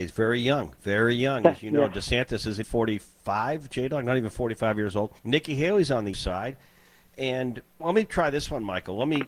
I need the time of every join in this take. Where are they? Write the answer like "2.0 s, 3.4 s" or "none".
2.6 s, 5.2 s, 6.1 s, 7.8 s